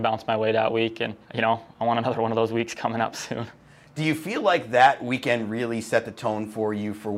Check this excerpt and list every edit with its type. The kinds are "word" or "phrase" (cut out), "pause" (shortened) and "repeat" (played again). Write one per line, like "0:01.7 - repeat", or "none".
0:01.2 - pause